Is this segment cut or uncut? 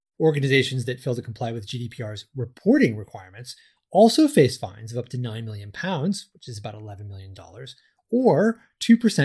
uncut